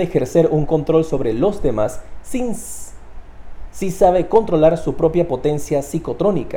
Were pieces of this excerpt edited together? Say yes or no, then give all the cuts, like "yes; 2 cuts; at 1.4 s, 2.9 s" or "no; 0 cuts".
no; 0 cuts